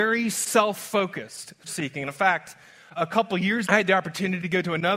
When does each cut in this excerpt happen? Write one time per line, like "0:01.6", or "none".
0:01.7
0:03.0
0:03.6

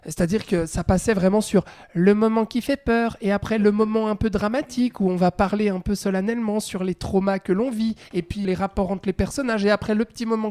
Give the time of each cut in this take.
0:08.0
0:08.4

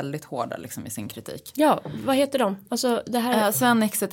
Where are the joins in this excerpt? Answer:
none

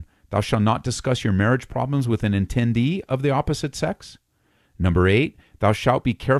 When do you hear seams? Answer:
none

